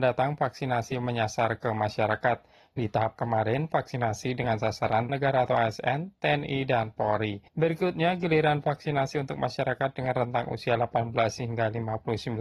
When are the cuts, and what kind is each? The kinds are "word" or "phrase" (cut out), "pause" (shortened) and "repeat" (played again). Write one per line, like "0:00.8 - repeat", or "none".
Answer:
0:03.2 - word
0:05.1 - phrase
0:07.5 - pause